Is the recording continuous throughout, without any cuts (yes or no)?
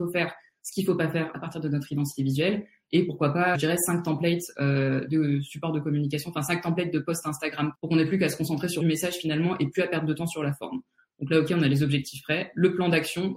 no